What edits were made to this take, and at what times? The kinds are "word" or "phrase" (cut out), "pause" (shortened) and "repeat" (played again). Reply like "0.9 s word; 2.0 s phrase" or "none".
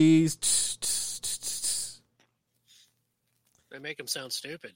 none